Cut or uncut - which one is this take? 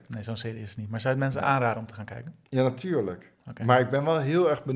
uncut